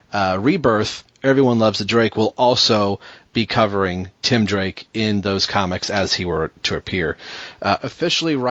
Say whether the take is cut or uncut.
uncut